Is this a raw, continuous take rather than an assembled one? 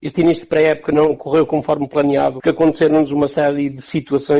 yes; 0 cuts

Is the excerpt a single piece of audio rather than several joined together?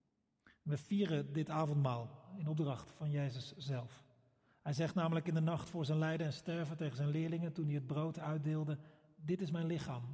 yes; 0 cuts

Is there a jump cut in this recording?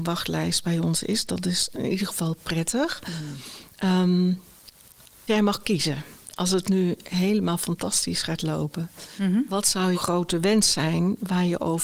yes; 3 cuts; at 1.7 s, 5.3 s, 9.9 s

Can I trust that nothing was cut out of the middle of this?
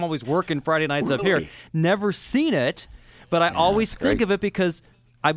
yes; 0 cuts

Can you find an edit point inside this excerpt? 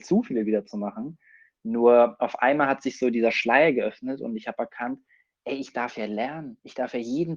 no; 0 cuts

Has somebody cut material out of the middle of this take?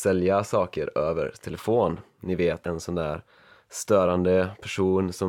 yes; 1 cut; at 2.6 s

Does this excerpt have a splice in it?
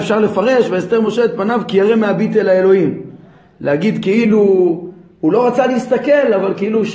no; 0 cuts

